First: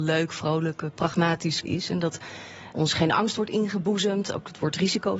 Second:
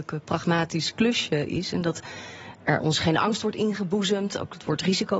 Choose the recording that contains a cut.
first; 2 cuts; at 1.6 s, 2.7 s

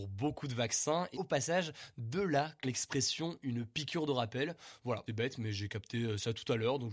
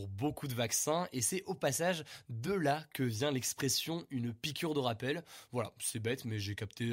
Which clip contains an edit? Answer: first; 3 cuts; at 1.1 s, 2.6 s, 5.1 s

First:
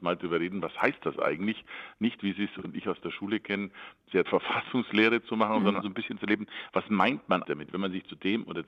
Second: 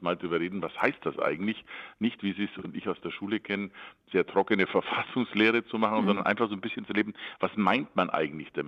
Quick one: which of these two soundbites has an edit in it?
first; 3 cuts; at 4.3 s, 5.8 s, 7.4 s

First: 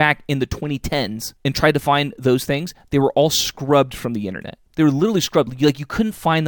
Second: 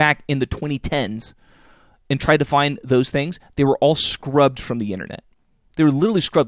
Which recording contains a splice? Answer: first; 2 cuts; at 1.4 s, 4.7 s

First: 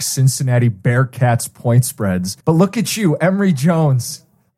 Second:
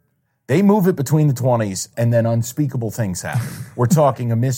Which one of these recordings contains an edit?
first; 1 cut; at 2.4 s

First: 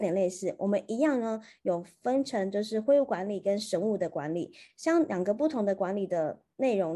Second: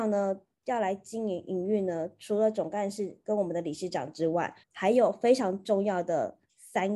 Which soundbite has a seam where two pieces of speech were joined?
second; 1 cut; at 4.6 s

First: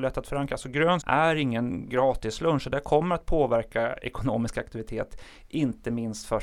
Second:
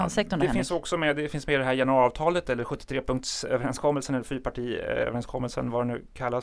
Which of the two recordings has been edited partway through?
first; 1 cut; at 1.0 s

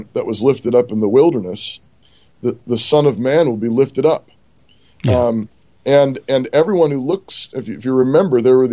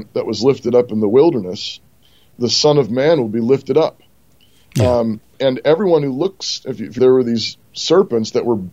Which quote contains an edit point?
second; 3 cuts; at 2.3 s, 5.3 s, 7.0 s

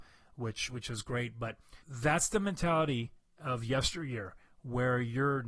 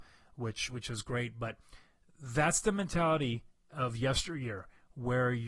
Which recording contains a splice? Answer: first; 1 cut; at 1.8 s

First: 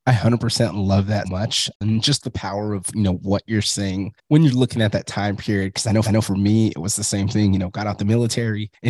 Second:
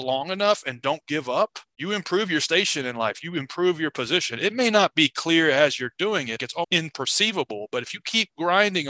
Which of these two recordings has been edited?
first; 2 cuts; at 1.2 s, 6.0 s

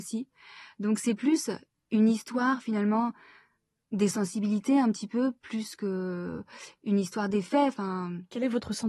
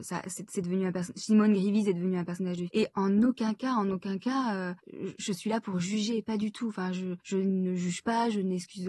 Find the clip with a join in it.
second; 3 cuts; at 2.7 s, 4.8 s, 7.2 s

